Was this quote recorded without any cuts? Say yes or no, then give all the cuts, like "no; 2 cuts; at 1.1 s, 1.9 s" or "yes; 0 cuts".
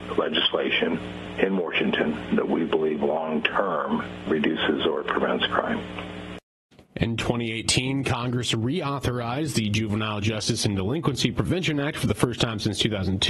yes; 0 cuts